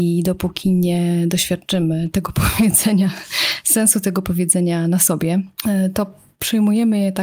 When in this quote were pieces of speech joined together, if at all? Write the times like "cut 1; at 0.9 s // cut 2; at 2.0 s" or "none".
none